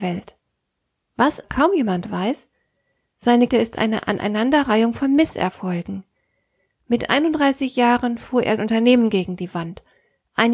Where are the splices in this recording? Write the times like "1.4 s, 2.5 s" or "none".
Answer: 1.4 s, 3.5 s, 8.6 s